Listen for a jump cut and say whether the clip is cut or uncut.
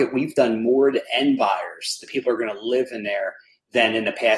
uncut